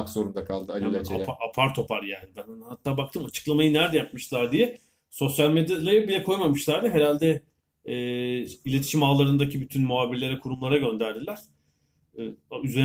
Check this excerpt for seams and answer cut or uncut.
uncut